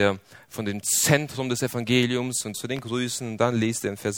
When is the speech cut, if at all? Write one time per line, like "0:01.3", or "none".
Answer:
0:02.5